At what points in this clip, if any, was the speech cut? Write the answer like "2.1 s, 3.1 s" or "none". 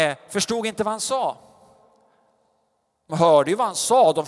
3.1 s